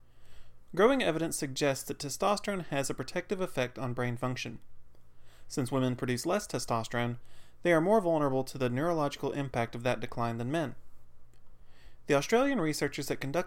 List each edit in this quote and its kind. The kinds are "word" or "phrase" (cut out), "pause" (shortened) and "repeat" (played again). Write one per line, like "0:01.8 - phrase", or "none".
none